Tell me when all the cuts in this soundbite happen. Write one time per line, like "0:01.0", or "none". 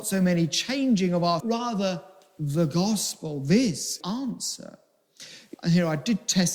0:01.4
0:04.0
0:05.5

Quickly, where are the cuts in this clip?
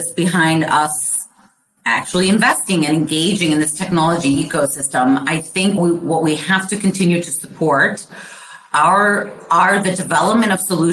0:05.8

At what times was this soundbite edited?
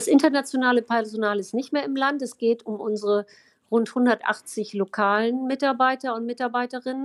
none

